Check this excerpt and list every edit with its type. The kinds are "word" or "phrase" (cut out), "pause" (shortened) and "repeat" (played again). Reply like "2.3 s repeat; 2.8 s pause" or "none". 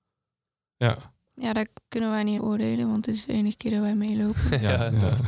2.4 s word

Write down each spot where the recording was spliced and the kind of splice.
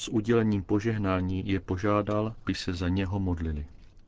2.5 s word

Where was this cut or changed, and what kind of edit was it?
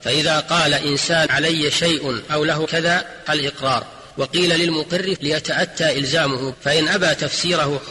1.3 s word; 2.7 s word; 3.3 s word; 4.1 s pause; 5.2 s word; 6.5 s word

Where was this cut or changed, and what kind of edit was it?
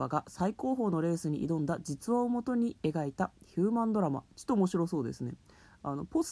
4.3 s pause

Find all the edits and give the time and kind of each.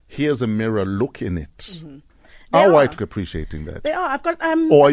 3.0 s word

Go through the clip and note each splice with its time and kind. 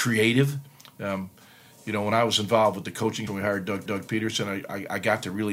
3.3 s word; 3.9 s repeat

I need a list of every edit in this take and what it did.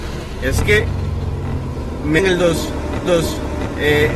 2.2 s word; 3.1 s repeat

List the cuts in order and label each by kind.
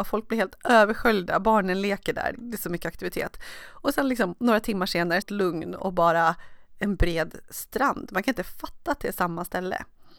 2.3 s word; 5.2 s phrase

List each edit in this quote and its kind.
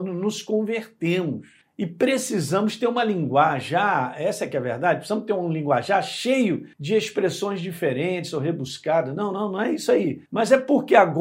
1.6 s pause; 6.7 s pause; 10.3 s pause

